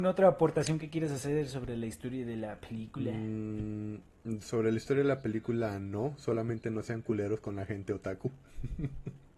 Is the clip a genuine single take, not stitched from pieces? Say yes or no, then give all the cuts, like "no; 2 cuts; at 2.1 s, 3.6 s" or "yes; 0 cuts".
yes; 0 cuts